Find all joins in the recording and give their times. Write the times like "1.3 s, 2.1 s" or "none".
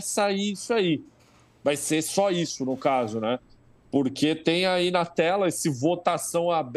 none